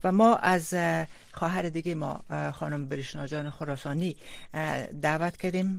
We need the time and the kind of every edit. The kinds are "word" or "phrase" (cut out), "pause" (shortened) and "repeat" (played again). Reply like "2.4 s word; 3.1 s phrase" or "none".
none